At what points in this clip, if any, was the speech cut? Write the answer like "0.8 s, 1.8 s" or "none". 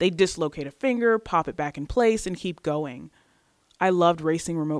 none